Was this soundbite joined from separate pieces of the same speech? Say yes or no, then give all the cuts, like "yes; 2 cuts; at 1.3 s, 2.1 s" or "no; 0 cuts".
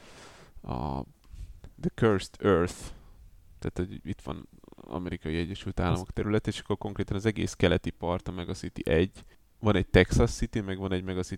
no; 0 cuts